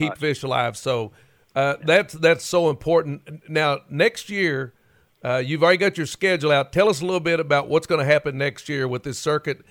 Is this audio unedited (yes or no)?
yes